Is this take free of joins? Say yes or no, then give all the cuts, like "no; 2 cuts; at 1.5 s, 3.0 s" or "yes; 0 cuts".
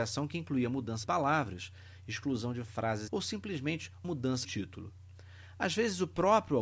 no; 4 cuts; at 1.0 s, 3.1 s, 4.0 s, 4.4 s